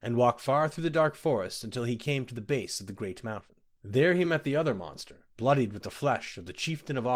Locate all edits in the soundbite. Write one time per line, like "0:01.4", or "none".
none